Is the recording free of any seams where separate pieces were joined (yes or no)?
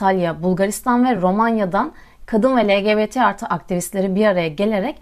yes